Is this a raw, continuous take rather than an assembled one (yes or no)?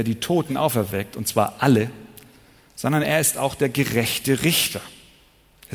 yes